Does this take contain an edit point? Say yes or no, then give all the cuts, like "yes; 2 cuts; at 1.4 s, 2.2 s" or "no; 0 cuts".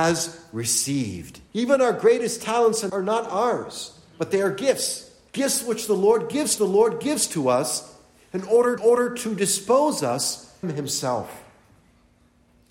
yes; 6 cuts; at 1.5 s, 2.9 s, 5.3 s, 6.6 s, 8.8 s, 10.6 s